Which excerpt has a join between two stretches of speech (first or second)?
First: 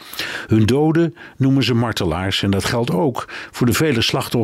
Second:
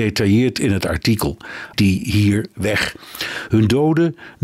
second